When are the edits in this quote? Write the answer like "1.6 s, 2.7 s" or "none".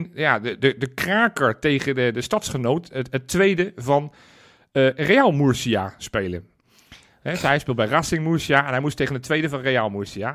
none